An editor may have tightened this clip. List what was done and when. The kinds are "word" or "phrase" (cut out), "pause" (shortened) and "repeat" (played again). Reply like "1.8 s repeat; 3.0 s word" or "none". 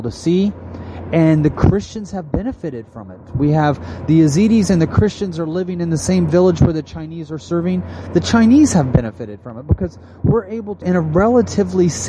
10.8 s word